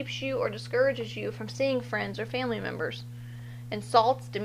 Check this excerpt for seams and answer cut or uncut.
uncut